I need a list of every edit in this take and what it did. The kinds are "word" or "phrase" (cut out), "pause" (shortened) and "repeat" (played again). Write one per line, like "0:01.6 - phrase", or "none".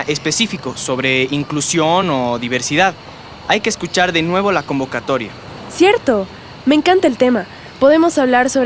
none